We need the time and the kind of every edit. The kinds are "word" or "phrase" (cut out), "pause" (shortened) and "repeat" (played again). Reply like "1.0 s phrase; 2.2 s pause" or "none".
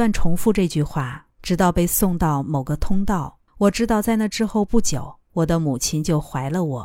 1.3 s pause; 3.5 s pause; 5.2 s pause